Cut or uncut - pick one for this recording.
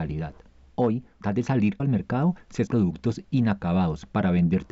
cut